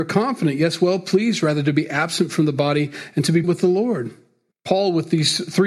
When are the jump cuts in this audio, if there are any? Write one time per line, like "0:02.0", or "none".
0:03.4
0:04.5